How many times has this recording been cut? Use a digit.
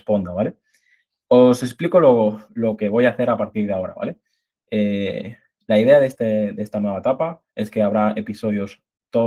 2